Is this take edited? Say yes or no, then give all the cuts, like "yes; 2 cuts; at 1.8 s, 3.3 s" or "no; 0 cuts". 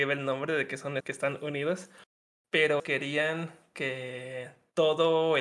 yes; 2 cuts; at 1.0 s, 2.8 s